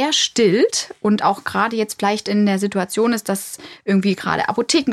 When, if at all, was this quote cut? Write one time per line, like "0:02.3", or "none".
none

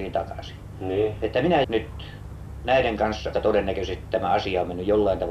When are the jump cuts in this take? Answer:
0:01.6
0:03.3

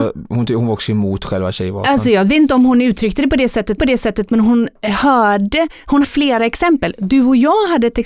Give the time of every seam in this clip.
0:03.8
0:06.0

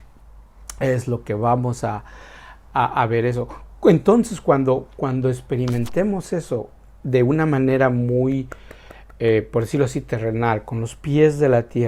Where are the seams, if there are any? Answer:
none

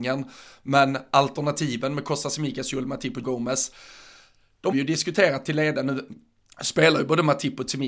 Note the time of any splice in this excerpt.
0:03.2
0:04.7

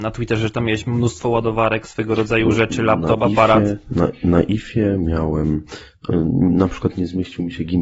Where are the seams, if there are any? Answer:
none

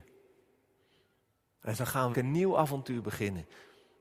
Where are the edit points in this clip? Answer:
0:01.2
0:02.1

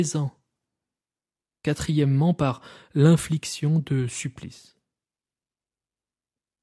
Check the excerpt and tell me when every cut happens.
none

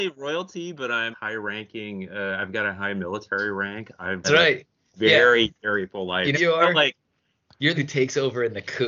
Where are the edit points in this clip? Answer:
0:01.1
0:04.2
0:06.3
0:07.7

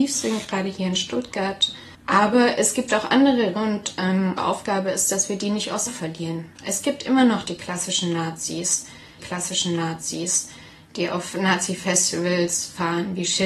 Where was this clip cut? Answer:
0:01.9
0:03.5
0:04.4
0:05.9
0:09.2

